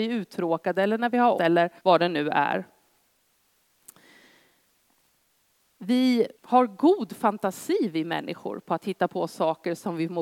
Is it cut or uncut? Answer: cut